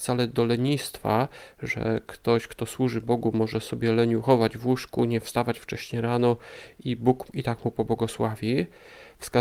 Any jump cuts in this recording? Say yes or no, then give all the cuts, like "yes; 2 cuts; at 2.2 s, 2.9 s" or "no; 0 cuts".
no; 0 cuts